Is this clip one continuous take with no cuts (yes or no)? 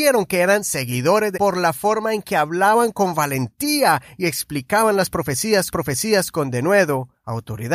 no